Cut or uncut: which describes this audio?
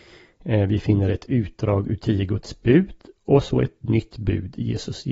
uncut